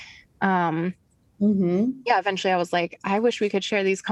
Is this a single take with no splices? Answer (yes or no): yes